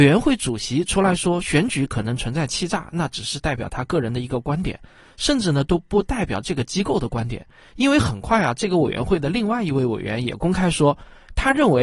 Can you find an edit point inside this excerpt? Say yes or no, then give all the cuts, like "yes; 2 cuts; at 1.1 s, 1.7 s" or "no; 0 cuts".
no; 0 cuts